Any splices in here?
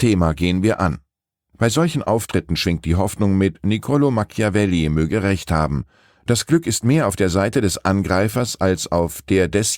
no; 0 cuts

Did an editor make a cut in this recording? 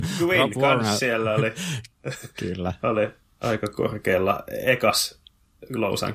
no; 0 cuts

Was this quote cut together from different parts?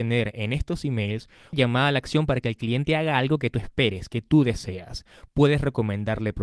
yes; 1 cut; at 1.5 s

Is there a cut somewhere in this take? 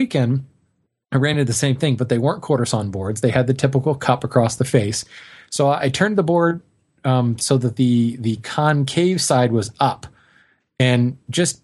no; 0 cuts

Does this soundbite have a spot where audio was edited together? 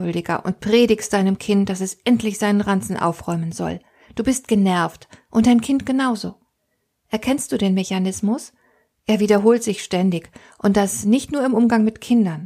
no; 0 cuts

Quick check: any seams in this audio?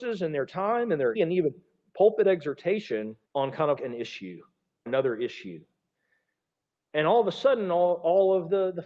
yes; 4 cuts; at 1.2 s, 3.2 s, 3.8 s, 4.9 s

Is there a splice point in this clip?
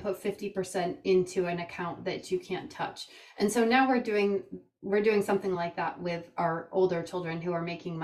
no; 0 cuts

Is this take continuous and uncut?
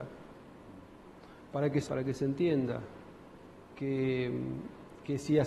no; 1 cut; at 1.9 s

